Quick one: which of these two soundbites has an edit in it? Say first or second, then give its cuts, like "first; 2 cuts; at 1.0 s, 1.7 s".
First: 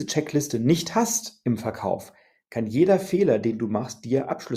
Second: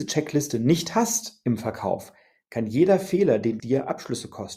second; 1 cut; at 3.6 s